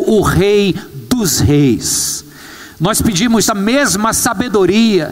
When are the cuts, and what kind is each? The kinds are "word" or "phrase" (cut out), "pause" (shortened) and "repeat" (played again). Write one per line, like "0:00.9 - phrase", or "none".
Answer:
0:03.5 - phrase